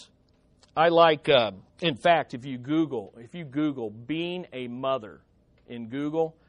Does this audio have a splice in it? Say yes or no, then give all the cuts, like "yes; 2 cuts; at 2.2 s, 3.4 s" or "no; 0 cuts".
yes; 1 cut; at 1.7 s